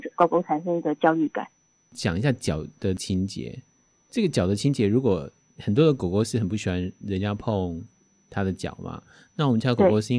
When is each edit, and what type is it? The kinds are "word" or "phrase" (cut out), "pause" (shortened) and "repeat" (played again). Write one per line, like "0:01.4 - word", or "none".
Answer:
none

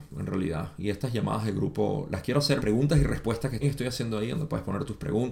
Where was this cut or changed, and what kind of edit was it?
0:02.6 - phrase
0:03.6 - word

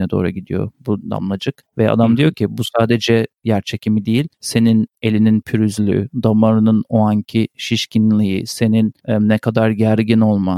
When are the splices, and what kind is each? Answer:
0:04.3 - pause

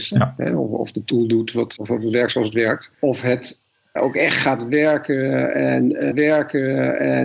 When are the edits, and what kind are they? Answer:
0:01.8 - word
0:02.9 - pause
0:04.0 - word
0:06.1 - repeat

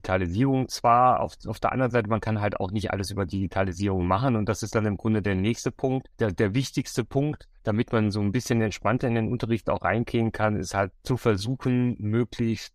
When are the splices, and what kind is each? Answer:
0:06.1 - pause
0:07.6 - pause

